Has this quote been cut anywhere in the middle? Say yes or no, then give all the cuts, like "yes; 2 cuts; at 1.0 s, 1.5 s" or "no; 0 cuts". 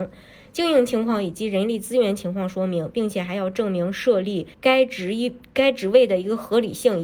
yes; 1 cut; at 4.5 s